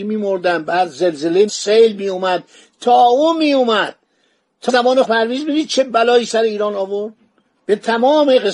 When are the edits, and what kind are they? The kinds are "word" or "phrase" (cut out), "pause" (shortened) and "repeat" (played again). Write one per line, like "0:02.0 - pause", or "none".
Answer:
0:01.5 - word
0:04.7 - word
0:05.0 - word